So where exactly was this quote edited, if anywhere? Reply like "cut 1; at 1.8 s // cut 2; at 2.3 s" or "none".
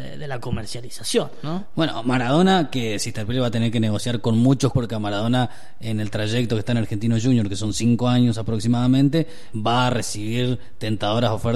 cut 1; at 4.7 s // cut 2; at 9.5 s